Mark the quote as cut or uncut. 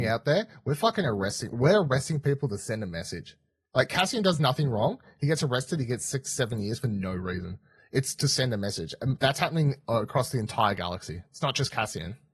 cut